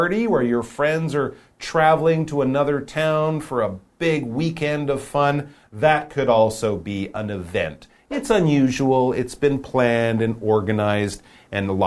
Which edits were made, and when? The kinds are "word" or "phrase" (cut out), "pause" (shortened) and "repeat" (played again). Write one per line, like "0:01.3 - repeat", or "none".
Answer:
none